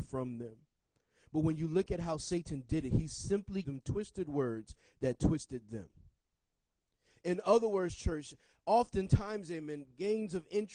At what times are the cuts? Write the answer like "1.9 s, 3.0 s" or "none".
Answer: 3.6 s